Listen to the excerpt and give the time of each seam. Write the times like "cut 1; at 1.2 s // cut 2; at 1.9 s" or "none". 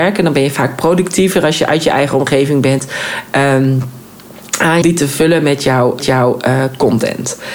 cut 1; at 4.8 s // cut 2; at 6.0 s